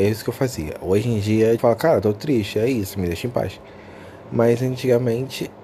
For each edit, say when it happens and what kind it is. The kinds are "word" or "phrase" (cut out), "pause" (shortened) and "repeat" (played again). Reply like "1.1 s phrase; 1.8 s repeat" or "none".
1.6 s word